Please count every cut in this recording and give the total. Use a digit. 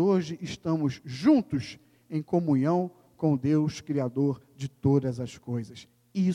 0